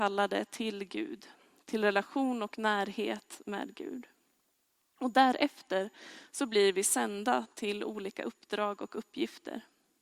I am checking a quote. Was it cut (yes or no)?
no